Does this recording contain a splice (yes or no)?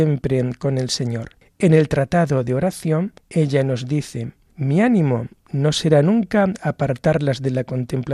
no